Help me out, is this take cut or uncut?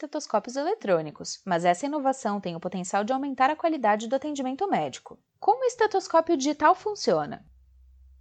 cut